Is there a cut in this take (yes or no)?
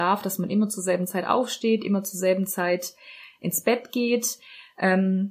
no